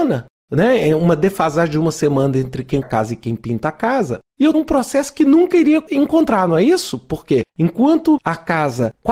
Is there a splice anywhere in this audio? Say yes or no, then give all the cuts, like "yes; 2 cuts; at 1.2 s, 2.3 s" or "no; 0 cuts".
yes; 3 cuts; at 2.8 s, 4.5 s, 7.5 s